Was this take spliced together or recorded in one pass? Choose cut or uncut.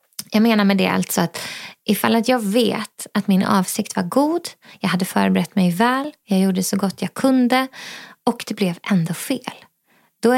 uncut